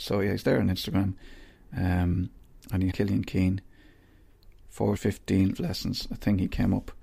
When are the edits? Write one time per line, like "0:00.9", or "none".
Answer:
0:02.9
0:05.0
0:05.5